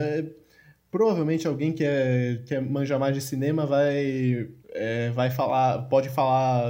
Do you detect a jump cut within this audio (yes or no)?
yes